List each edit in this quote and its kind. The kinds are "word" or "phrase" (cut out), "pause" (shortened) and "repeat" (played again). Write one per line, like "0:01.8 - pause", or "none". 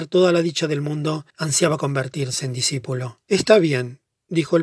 0:01.3 - pause
0:03.2 - pause